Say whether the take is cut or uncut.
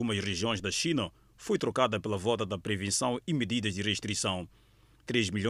uncut